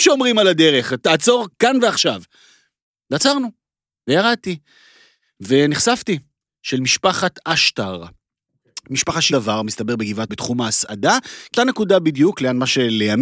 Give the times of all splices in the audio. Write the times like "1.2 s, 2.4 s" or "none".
1.0 s, 1.5 s, 6.5 s, 9.3 s, 10.3 s, 11.6 s